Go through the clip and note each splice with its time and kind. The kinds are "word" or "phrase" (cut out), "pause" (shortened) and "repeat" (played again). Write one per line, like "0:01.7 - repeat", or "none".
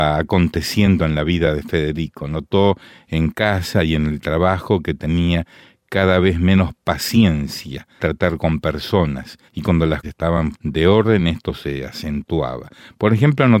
0:08.0 - word
0:09.5 - pause
0:10.0 - word
0:10.5 - word